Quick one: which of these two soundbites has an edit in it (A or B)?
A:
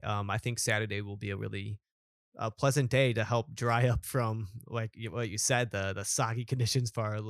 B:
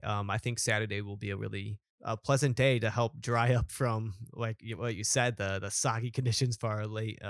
B